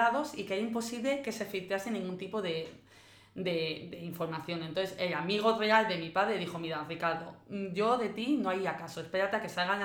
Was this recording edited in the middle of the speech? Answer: no; 0 cuts

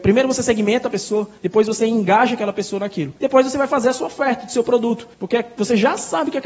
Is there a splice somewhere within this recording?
yes; 3 cuts; at 1.4 s, 3.2 s, 5.1 s

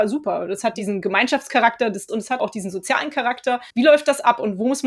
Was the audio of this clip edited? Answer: yes; 3 cuts; at 2.1 s, 2.4 s, 3.7 s

